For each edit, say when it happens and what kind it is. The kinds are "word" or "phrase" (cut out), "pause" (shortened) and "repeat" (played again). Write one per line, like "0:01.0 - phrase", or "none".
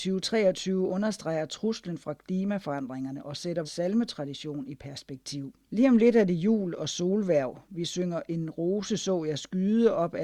0:03.6 - word
0:05.6 - pause